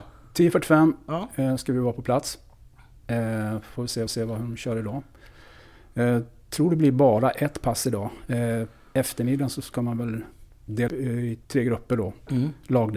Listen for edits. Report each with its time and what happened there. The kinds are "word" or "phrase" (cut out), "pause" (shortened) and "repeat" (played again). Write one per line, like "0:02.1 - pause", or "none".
0:04.1 - repeat
0:10.9 - word
0:11.4 - pause